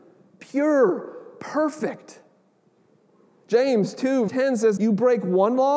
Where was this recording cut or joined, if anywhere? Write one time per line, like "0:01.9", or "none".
0:04.3
0:04.8